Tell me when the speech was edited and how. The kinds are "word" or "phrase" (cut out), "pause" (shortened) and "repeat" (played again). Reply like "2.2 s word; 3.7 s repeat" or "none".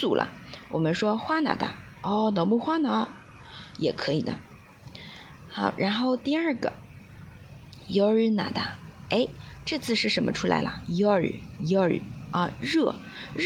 none